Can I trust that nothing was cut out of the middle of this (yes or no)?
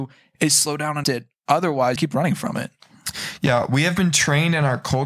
no